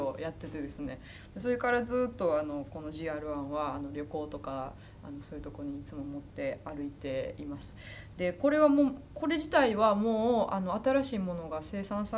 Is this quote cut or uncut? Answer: uncut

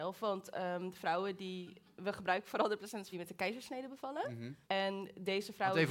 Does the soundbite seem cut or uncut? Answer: cut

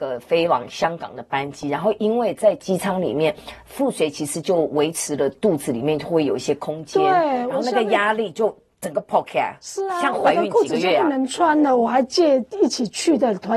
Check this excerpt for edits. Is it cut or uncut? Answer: uncut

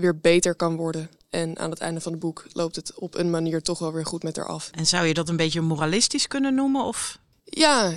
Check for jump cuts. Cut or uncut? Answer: uncut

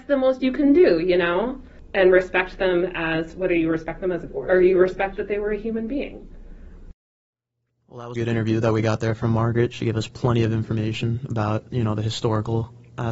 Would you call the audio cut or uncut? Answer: cut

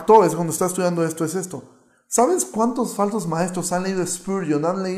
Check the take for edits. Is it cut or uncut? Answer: uncut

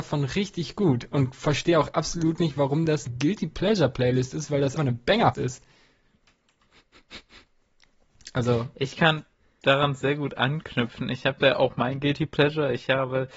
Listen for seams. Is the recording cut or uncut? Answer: cut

